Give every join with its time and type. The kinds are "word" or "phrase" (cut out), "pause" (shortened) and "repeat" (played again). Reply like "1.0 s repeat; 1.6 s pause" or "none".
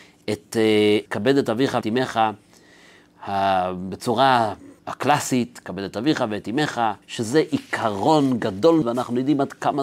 1.1 s word; 1.8 s word; 4.8 s pause; 7.0 s pause; 8.8 s word